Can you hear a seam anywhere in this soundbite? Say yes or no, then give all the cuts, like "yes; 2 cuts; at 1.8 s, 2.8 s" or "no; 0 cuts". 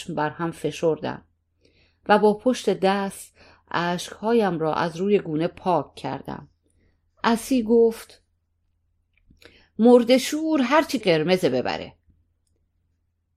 yes; 1 cut; at 11.0 s